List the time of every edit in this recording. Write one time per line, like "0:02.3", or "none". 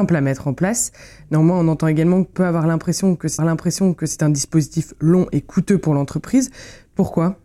0:02.3
0:03.4